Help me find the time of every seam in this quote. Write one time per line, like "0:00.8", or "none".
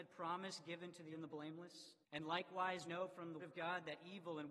0:01.1
0:02.0
0:02.9
0:03.4

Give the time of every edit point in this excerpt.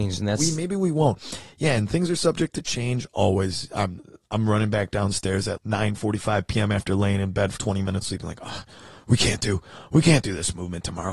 0:05.6
0:07.6
0:08.0

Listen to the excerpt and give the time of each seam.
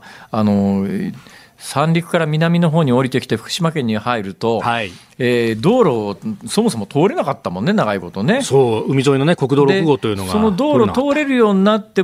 none

